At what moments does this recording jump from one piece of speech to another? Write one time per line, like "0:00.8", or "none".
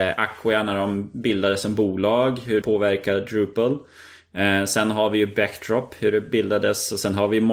0:02.6